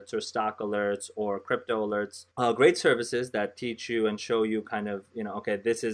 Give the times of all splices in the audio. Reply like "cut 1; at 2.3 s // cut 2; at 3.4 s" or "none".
cut 1; at 2.3 s